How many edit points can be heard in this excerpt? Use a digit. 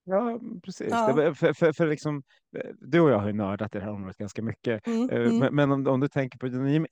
0